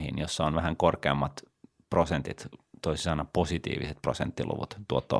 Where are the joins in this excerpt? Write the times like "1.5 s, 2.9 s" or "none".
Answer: none